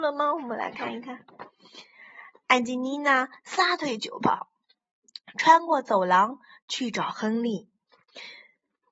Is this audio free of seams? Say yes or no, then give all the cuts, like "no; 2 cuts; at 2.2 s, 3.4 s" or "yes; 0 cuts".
yes; 0 cuts